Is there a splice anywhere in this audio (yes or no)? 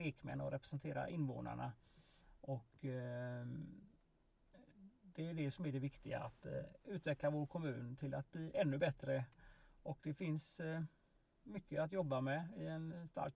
no